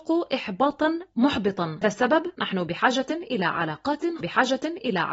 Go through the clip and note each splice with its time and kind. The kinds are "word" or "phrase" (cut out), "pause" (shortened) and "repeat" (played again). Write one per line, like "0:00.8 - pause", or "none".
0:01.8 - word
0:04.2 - repeat